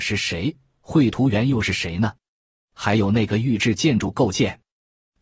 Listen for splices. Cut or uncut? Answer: uncut